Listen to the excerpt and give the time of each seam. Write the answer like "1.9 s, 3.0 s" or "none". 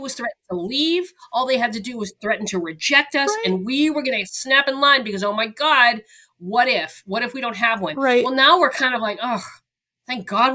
none

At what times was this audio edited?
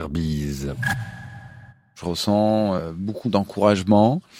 1.7 s, 3.2 s

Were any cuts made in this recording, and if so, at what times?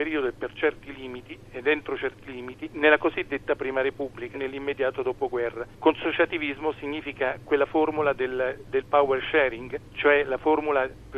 4.3 s

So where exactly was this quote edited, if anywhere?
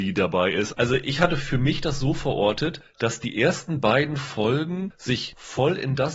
none

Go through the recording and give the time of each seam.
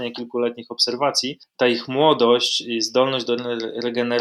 none

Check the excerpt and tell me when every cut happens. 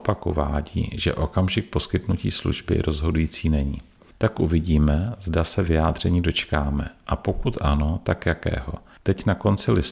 none

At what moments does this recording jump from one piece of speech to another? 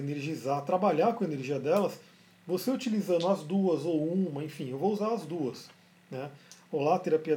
none

